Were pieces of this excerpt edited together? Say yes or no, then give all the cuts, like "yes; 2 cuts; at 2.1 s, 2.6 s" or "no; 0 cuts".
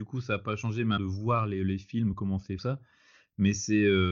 yes; 2 cuts; at 1.0 s, 2.6 s